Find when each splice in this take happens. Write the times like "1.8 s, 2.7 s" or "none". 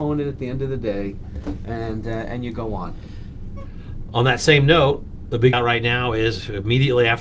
5.5 s